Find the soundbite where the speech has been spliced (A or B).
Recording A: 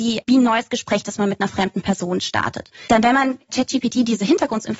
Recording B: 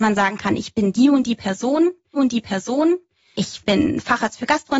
B